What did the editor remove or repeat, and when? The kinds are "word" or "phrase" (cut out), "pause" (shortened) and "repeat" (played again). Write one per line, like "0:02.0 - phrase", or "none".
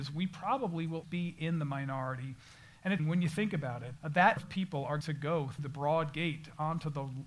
0:01.0 - word
0:03.0 - word
0:04.0 - word
0:04.4 - word
0:05.0 - word
0:05.6 - word